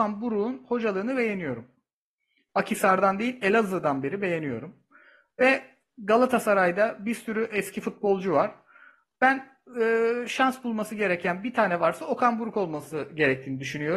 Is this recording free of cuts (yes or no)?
yes